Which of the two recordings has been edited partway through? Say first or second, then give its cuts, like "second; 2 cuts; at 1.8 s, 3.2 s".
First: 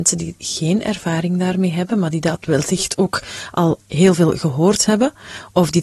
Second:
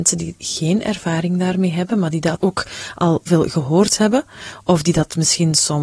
second; 2 cuts; at 2.4 s, 3.3 s